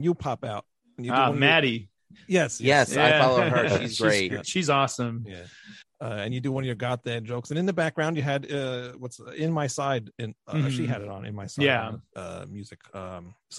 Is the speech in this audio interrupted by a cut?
yes; 1 cut; at 5.8 s

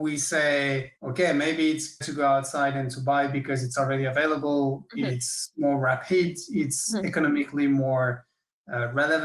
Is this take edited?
yes; 2 cuts; at 1.0 s, 2.0 s

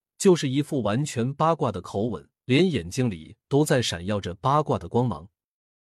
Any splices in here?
yes; 1 cut; at 2.4 s

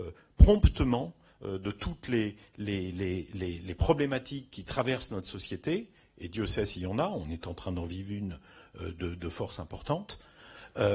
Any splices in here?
no; 0 cuts

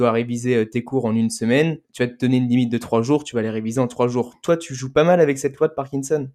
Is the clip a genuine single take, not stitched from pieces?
no; 1 cut; at 1.8 s

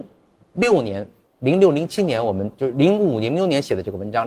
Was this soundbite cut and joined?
yes; 1 cut; at 1.3 s

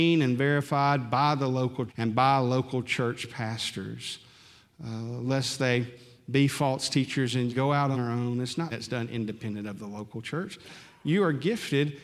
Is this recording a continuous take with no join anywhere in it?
no; 4 cuts; at 1.9 s, 7.5 s, 7.9 s, 8.7 s

